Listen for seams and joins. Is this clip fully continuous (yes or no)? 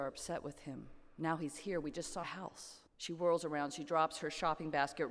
no